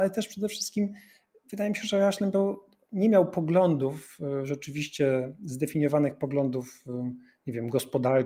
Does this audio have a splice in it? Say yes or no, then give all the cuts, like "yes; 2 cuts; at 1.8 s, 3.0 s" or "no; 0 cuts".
no; 0 cuts